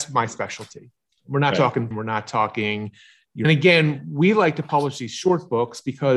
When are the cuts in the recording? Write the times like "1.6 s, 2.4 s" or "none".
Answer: 1.9 s, 3.4 s